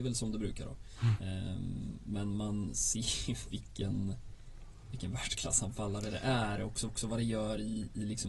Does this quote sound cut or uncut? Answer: cut